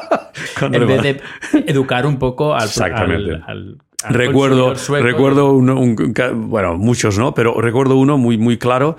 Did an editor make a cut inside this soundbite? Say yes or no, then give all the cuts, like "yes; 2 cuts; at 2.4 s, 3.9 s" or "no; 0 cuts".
no; 0 cuts